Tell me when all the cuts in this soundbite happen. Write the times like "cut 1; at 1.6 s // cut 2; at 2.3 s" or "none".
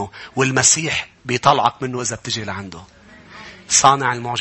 cut 1; at 1.2 s